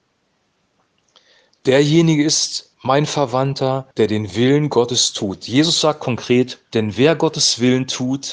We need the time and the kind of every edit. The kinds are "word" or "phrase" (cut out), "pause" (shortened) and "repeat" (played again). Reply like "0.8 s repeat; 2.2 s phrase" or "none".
2.7 s pause; 3.9 s pause; 6.7 s pause